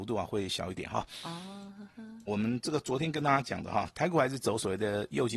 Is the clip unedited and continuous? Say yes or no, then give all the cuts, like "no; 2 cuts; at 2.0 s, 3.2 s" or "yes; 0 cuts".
no; 1 cut; at 2.3 s